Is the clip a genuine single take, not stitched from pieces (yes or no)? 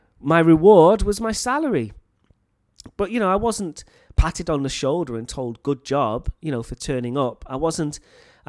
yes